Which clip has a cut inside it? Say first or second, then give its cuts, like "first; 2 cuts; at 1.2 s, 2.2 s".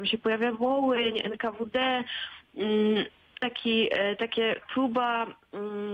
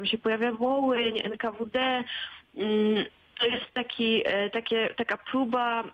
first; 2 cuts; at 3.4 s, 4.6 s